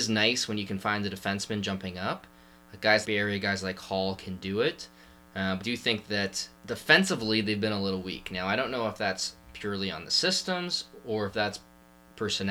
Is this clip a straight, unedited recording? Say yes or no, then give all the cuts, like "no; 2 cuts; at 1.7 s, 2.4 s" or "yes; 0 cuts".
no; 3 cuts; at 3.0 s, 5.6 s, 6.6 s